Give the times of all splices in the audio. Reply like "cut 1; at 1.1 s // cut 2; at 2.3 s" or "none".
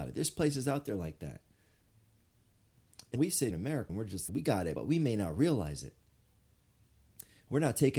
cut 1; at 3.2 s // cut 2; at 3.5 s // cut 3; at 3.9 s // cut 4; at 4.3 s // cut 5; at 4.7 s